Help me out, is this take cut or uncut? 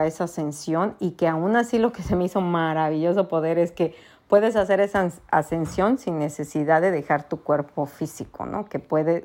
uncut